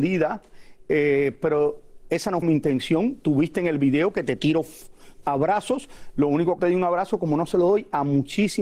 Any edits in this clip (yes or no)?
yes